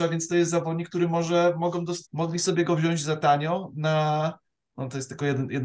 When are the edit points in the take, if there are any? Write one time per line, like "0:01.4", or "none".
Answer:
0:02.1